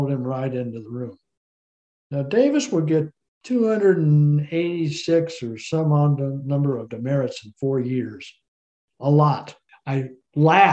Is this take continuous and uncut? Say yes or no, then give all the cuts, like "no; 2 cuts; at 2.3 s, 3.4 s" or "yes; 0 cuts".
yes; 0 cuts